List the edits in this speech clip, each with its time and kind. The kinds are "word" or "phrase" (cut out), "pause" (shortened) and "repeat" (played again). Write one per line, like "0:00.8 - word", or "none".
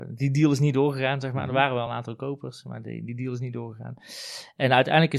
none